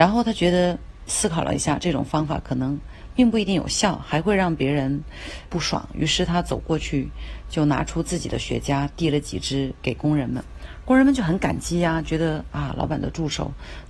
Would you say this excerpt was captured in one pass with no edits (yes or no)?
no